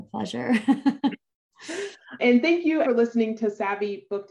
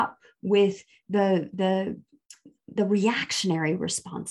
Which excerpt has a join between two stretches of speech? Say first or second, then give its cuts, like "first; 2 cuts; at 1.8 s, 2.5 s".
first; 2 cuts; at 2.2 s, 2.8 s